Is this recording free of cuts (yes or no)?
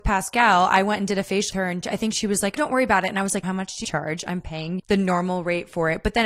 no